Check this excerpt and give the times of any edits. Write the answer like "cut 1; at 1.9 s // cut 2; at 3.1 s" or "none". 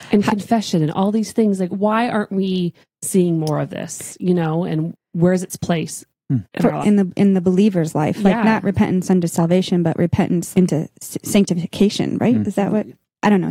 cut 1; at 1.7 s // cut 2; at 4.9 s // cut 3; at 6.8 s // cut 4; at 10.5 s